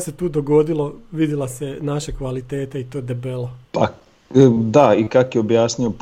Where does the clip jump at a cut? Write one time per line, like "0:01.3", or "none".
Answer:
0:03.6